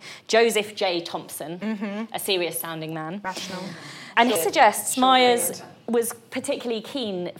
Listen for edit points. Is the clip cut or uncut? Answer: cut